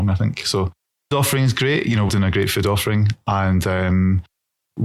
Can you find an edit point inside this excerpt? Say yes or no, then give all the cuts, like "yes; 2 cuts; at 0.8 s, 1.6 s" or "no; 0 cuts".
yes; 2 cuts; at 1.1 s, 2.1 s